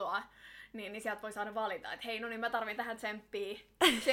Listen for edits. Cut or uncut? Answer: uncut